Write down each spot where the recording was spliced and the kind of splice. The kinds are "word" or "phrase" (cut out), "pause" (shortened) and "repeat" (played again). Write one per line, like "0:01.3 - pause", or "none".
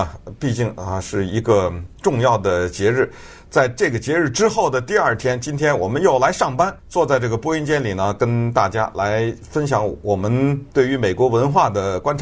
0:06.8 - pause
0:10.7 - pause